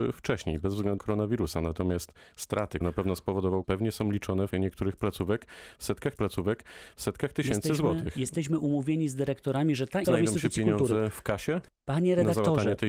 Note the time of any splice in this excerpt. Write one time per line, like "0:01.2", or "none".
0:01.0
0:02.8
0:03.6
0:04.5
0:06.1
0:10.0
0:11.7